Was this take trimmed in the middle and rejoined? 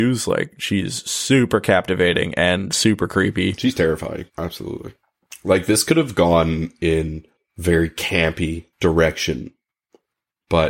yes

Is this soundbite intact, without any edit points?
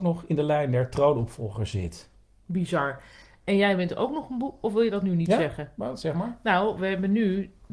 yes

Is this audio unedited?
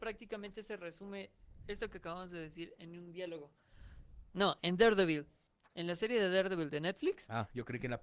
no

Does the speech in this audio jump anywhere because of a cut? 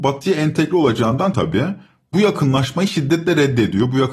yes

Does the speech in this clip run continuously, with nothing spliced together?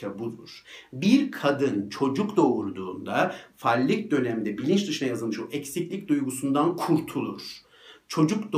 yes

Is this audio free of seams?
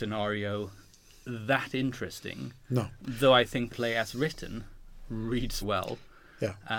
no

